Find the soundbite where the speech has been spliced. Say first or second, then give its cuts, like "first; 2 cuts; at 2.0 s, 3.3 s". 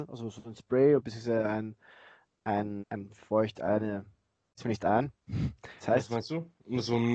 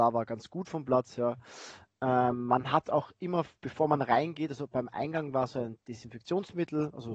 first; 3 cuts; at 2.8 s, 4.6 s, 5.8 s